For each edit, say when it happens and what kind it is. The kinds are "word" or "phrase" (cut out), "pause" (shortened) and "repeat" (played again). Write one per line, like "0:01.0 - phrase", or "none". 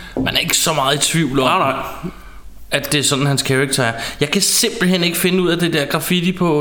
none